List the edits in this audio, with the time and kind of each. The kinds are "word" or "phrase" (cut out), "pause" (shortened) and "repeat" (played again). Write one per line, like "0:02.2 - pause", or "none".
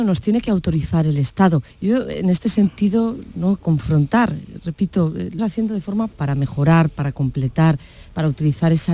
0:01.7 - pause
0:03.6 - word
0:05.4 - word
0:06.1 - word